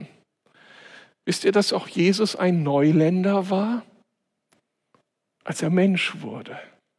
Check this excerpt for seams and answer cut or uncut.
uncut